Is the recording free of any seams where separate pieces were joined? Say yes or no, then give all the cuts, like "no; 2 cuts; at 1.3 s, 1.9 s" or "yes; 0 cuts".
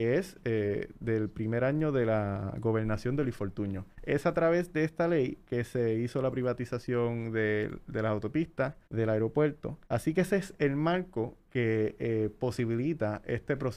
no; 3 cuts; at 3.9 s, 8.8 s, 9.8 s